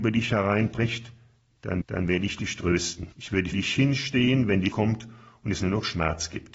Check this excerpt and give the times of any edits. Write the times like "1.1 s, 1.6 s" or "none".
1.8 s, 3.1 s, 3.5 s, 4.7 s